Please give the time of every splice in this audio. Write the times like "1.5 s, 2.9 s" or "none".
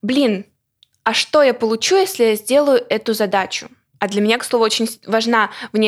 none